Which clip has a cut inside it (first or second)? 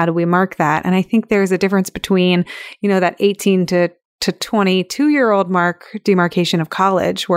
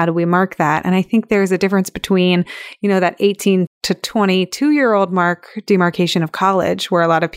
second